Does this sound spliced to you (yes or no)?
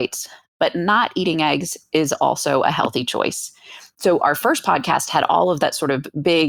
no